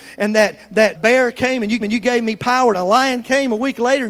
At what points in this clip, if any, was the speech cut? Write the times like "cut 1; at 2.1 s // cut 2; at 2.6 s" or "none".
cut 1; at 0.9 s // cut 2; at 1.8 s // cut 3; at 2.7 s